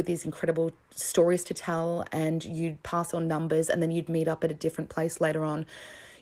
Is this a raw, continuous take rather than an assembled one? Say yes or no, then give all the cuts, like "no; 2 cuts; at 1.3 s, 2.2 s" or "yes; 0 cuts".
yes; 0 cuts